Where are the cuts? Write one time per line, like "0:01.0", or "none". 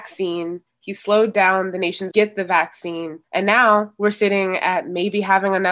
0:02.1